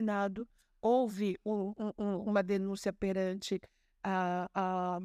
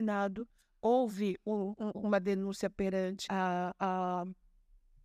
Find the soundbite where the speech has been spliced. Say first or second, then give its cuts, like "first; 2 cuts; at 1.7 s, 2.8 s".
second; 2 cuts; at 1.9 s, 3.3 s